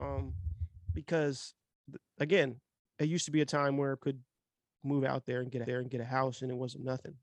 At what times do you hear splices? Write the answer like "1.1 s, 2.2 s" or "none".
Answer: 2.8 s, 4.0 s, 5.6 s